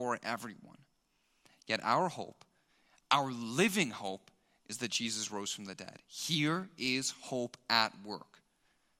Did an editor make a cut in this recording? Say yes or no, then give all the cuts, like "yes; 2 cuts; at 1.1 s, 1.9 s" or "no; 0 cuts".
no; 0 cuts